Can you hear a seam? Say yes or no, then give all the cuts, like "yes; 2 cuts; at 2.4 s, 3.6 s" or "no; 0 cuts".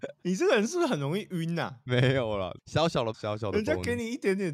yes; 1 cut; at 3.1 s